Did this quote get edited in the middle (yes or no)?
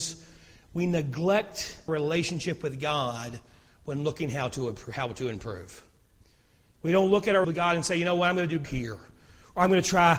yes